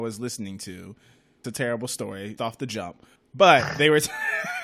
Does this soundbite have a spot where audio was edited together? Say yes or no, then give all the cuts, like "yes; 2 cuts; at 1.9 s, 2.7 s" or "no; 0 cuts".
yes; 3 cuts; at 1.4 s, 2.4 s, 3.2 s